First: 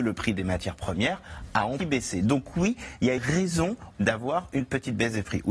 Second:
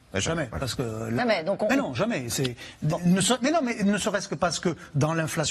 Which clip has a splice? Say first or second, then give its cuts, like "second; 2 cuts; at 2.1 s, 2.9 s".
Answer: first; 3 cuts; at 1.8 s, 3.2 s, 3.9 s